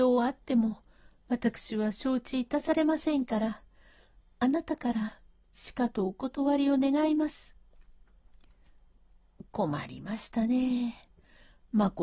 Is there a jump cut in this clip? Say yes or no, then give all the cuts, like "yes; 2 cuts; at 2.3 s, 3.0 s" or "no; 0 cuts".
no; 0 cuts